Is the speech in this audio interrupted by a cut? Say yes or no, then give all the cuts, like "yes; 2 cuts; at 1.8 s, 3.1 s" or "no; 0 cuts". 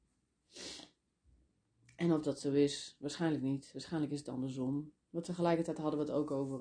no; 0 cuts